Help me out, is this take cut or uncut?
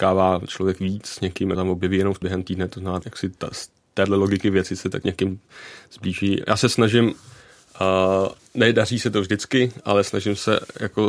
cut